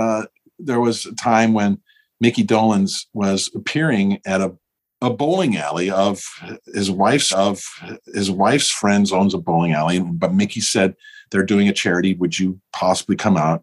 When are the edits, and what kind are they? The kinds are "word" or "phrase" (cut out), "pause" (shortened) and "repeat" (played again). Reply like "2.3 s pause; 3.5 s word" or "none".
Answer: 7.3 s repeat